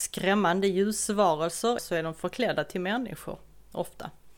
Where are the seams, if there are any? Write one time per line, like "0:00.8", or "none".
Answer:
0:01.8